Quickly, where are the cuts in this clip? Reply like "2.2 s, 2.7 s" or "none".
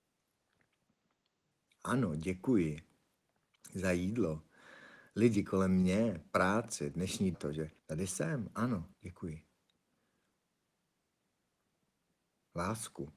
7.3 s, 7.8 s, 8.9 s